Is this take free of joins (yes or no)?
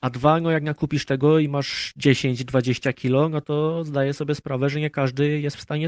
yes